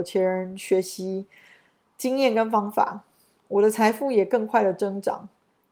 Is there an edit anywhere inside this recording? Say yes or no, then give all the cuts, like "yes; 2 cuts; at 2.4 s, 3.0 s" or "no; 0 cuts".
no; 0 cuts